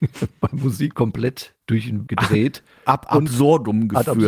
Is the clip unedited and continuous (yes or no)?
no